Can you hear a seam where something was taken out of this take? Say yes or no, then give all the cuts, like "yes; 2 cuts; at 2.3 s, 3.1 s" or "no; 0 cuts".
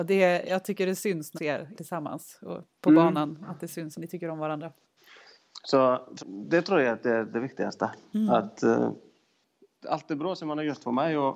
yes; 5 cuts; at 1.3 s, 1.7 s, 3.9 s, 6.2 s, 9.8 s